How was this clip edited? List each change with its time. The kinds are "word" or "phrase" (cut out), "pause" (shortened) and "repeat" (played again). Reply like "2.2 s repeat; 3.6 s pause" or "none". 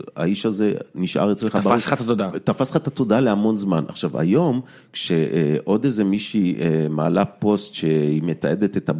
none